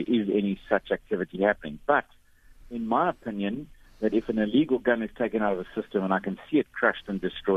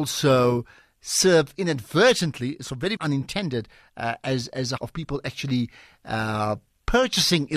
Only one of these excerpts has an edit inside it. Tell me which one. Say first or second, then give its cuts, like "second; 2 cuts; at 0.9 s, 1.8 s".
second; 2 cuts; at 3.0 s, 4.8 s